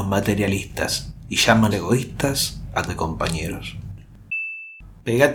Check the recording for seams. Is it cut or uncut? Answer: cut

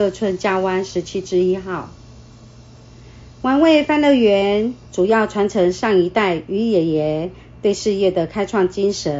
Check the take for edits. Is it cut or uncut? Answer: cut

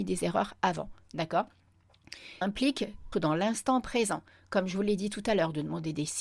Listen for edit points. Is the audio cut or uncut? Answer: cut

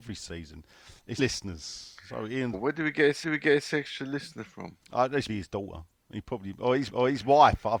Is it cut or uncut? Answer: cut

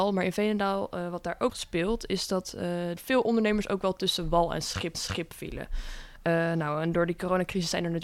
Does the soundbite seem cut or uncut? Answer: cut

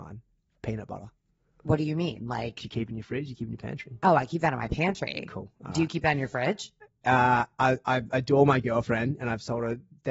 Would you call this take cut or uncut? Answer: uncut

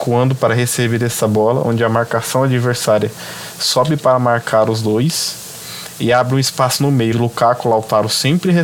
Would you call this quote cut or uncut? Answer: cut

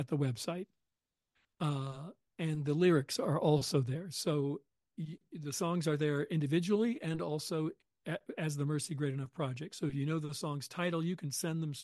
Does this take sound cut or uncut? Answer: uncut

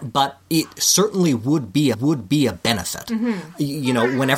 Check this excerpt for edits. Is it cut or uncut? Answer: cut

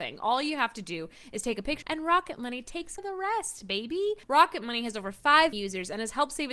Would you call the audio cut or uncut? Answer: cut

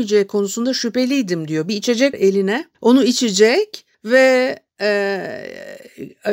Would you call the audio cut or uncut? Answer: cut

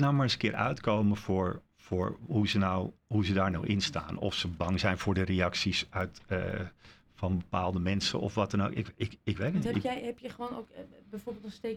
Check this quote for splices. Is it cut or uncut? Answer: uncut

